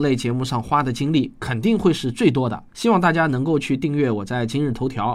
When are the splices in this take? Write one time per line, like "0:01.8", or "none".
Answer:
0:02.7